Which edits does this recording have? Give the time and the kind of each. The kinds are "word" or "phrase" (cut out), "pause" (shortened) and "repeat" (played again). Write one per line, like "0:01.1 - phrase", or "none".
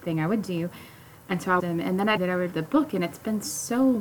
0:01.6 - word
0:02.2 - word
0:02.5 - word